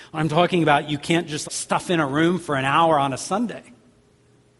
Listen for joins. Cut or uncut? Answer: cut